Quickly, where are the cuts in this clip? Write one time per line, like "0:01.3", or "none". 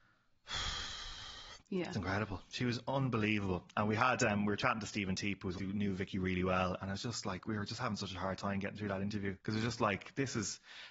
0:01.6
0:01.9
0:05.6
0:09.4